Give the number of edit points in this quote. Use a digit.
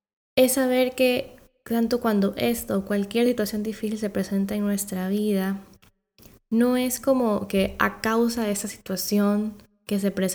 0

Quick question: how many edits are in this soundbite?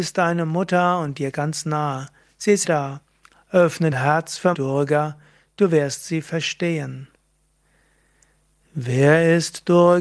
3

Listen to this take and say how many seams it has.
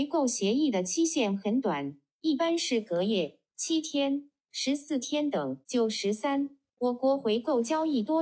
1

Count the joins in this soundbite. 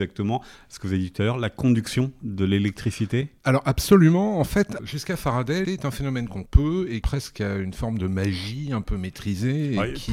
3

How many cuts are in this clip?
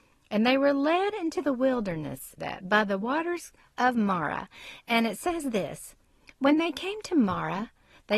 1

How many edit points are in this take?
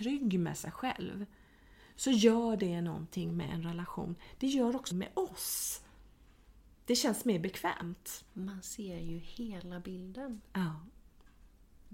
1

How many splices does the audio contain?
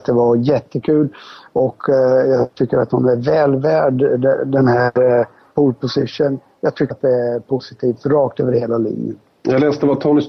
1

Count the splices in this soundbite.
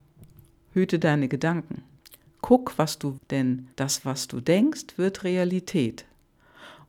3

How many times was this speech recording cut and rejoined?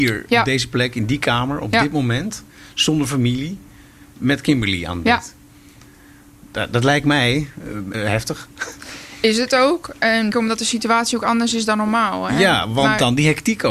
2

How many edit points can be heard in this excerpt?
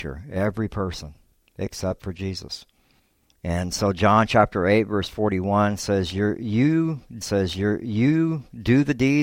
1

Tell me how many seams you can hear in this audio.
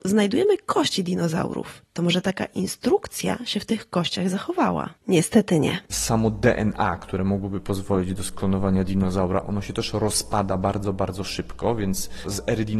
2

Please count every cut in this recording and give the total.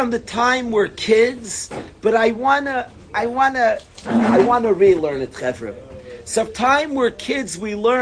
1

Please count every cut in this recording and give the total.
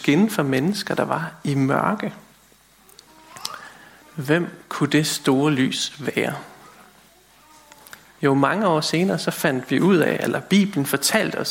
1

